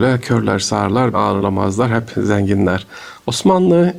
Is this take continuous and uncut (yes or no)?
no